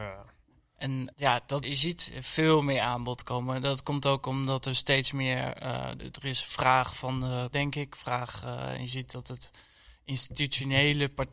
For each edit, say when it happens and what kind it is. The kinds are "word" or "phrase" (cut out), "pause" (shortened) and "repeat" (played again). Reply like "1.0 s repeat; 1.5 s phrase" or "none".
1.1 s word; 1.6 s word; 6.0 s word; 7.5 s word

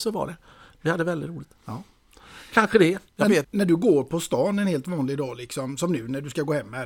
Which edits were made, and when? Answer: 1.6 s pause; 3.1 s pause; 3.4 s word

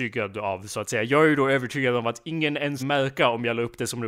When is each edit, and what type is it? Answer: 2.8 s word

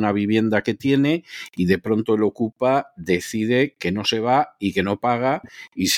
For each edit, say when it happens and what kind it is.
none

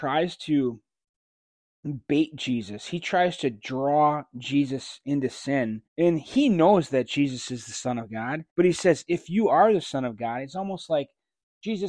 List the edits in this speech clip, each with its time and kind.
5.9 s pause; 8.5 s pause

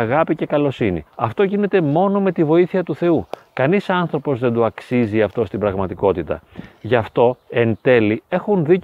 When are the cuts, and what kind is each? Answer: 1.1 s pause; 7.4 s pause

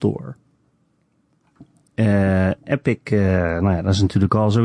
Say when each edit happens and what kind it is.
none

